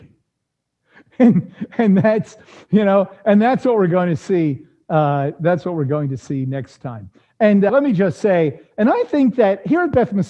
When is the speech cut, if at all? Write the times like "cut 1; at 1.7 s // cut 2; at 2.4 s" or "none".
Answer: cut 1; at 7.7 s